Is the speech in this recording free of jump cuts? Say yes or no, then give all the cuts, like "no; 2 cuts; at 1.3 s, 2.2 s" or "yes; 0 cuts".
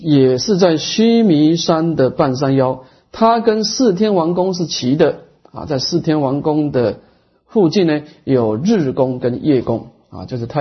yes; 0 cuts